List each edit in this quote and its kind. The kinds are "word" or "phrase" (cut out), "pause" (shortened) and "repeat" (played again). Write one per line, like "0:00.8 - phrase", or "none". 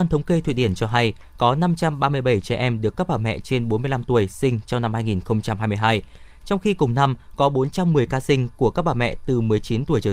none